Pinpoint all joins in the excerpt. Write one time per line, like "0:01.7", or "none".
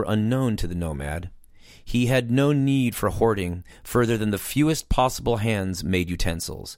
none